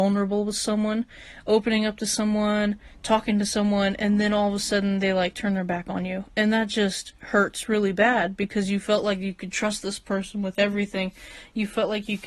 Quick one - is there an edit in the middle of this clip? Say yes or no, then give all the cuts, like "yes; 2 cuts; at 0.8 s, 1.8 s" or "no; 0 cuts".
no; 0 cuts